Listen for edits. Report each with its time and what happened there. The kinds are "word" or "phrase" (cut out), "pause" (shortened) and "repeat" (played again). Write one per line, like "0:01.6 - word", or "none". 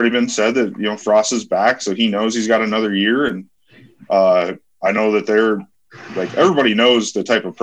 none